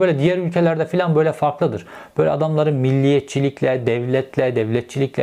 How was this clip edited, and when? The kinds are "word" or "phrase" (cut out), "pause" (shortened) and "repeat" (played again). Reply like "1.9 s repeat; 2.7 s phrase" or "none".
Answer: none